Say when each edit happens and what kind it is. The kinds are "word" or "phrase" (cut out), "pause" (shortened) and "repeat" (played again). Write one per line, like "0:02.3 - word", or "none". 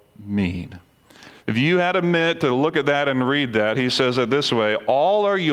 none

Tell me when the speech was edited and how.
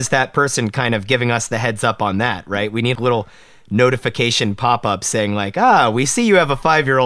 0:02.9 - word

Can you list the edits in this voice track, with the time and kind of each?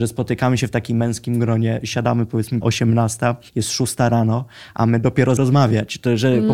0:02.6 - word
0:05.4 - word

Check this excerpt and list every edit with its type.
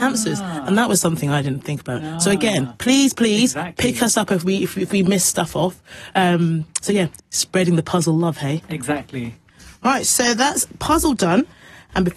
0:07.2 - word

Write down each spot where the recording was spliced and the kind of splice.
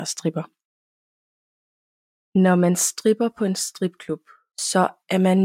none

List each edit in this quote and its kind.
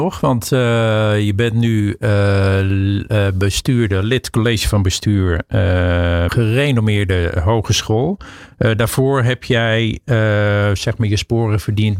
0:06.3 - phrase

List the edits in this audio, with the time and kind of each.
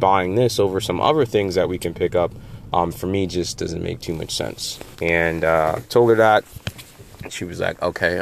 0:04.9 - pause

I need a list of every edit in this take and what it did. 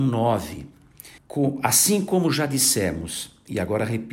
0:01.2 - pause

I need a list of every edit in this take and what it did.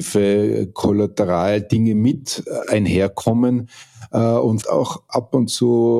0:04.6 - word

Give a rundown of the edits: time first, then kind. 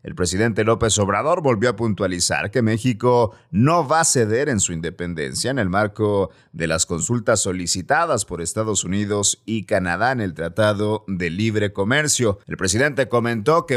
0:12.4 - pause

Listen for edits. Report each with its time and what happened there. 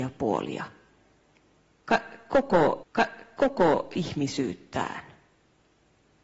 0:02.8 - repeat

